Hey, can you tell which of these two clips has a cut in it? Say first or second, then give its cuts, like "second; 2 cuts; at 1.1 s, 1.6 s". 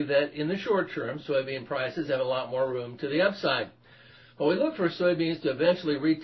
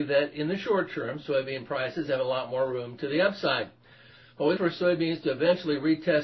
second; 1 cut; at 4.6 s